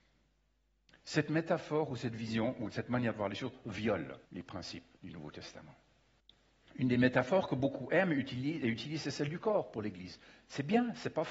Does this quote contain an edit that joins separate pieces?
yes; 3 cuts; at 4.3 s, 5.0 s, 6.2 s

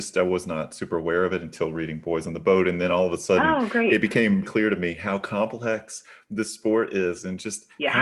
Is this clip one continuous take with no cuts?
no; 1 cut; at 4.4 s

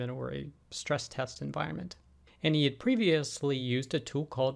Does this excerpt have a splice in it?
no; 0 cuts

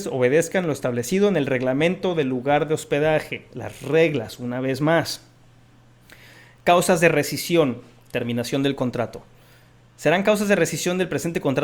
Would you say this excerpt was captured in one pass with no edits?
yes; 0 cuts

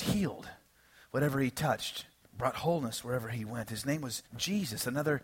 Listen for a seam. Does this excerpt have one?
yes; 2 cuts; at 2.2 s, 4.3 s

